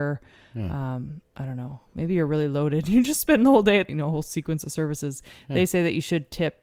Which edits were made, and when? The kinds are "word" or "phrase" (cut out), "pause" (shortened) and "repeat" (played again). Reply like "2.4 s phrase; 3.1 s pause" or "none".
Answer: 3.9 s phrase